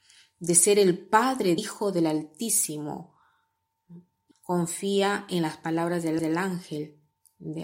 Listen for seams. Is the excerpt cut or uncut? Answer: cut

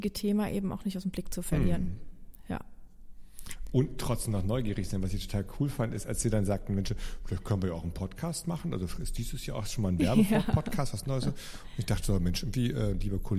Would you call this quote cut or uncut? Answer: uncut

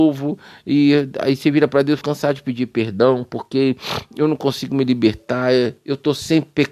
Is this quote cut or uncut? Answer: cut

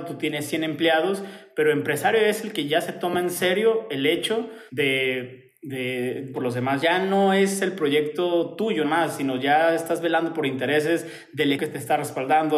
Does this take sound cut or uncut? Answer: cut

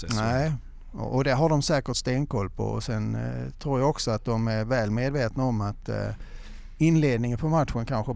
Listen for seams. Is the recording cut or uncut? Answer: uncut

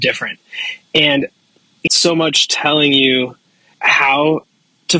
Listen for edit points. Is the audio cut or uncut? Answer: cut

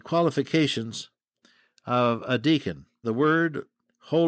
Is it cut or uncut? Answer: cut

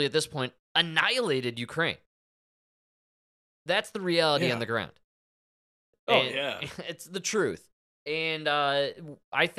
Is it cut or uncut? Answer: uncut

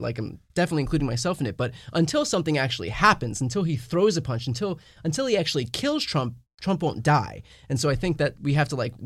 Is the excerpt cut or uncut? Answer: uncut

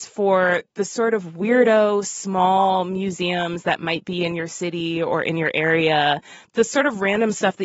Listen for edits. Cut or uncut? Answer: uncut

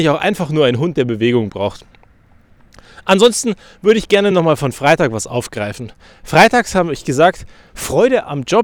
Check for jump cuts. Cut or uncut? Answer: uncut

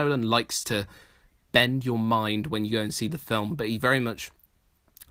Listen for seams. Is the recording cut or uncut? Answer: uncut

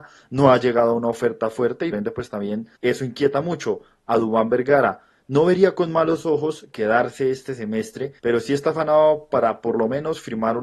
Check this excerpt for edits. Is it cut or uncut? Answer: cut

